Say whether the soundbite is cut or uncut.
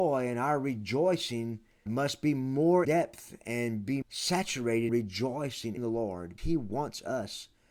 cut